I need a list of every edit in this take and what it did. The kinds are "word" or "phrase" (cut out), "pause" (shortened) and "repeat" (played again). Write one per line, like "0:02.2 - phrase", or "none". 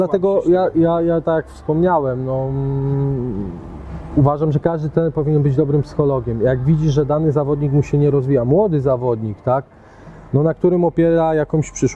none